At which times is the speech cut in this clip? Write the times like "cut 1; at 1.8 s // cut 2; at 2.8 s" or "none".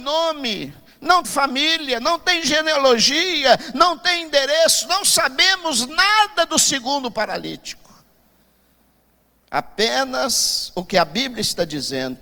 cut 1; at 1.2 s